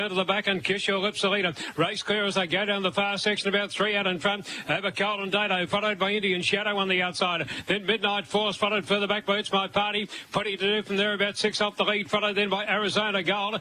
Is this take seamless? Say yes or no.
yes